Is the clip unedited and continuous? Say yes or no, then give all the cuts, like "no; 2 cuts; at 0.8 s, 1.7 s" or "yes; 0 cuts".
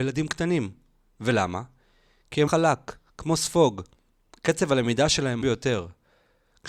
no; 2 cuts; at 2.5 s, 5.4 s